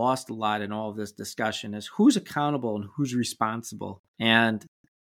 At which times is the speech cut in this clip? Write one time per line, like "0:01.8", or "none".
0:04.1